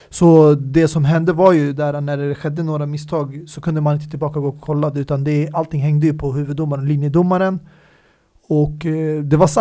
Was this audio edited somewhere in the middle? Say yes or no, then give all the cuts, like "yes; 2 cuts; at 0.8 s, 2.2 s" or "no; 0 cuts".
no; 0 cuts